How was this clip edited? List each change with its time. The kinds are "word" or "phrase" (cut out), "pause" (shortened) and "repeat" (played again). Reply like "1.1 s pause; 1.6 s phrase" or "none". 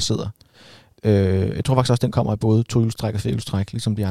none

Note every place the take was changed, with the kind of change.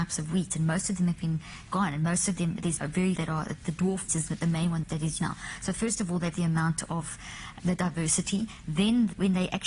1.7 s word; 2.8 s word; 3.2 s word; 4.1 s word; 4.8 s word; 5.2 s word; 6.3 s word; 7.6 s word

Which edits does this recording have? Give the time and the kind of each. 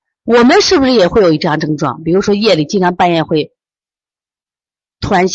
none

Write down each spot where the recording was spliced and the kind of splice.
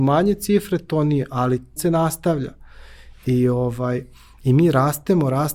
1.8 s phrase

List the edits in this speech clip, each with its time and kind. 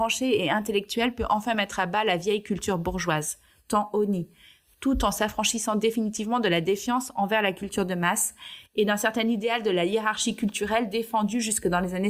none

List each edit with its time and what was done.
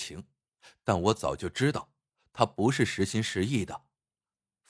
none

